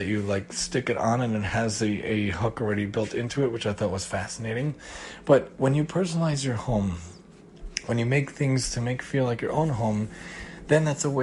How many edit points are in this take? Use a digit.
0